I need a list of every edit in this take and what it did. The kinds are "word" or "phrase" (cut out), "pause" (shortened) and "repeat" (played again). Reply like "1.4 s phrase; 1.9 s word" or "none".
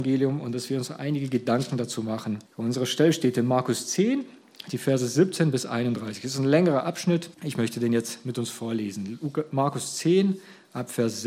2.5 s pause; 7.3 s pause